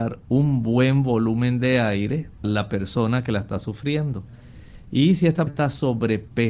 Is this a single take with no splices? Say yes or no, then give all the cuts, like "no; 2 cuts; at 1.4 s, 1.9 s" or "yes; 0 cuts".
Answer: no; 2 cuts; at 2.4 s, 5.5 s